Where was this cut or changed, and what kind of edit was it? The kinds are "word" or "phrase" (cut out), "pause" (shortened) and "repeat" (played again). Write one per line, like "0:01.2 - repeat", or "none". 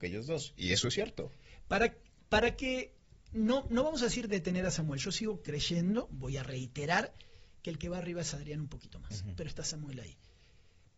none